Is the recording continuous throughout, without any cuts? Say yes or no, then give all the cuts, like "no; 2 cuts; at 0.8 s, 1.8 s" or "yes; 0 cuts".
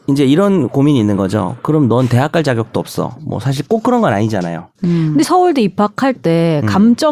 no; 2 cuts; at 4.8 s, 5.2 s